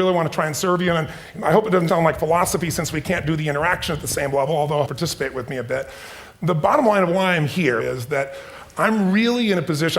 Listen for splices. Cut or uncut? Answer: cut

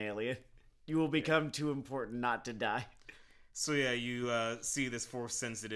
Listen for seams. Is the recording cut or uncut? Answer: uncut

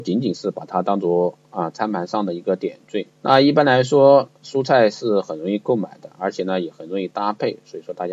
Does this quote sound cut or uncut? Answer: cut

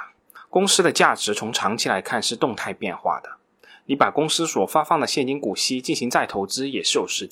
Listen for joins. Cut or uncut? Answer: uncut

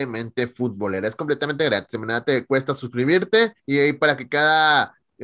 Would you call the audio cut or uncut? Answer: cut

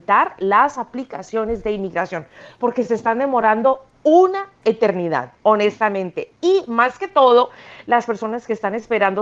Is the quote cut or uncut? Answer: uncut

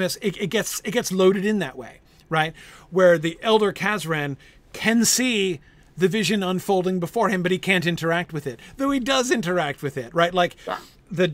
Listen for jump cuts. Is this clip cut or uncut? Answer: uncut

